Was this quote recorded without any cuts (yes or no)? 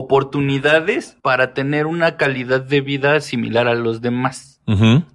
no